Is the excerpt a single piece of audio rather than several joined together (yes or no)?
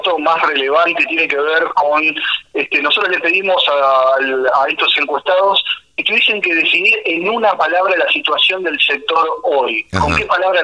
yes